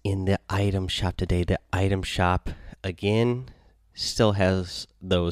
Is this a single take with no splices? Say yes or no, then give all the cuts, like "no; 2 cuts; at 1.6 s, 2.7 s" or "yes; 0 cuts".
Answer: yes; 0 cuts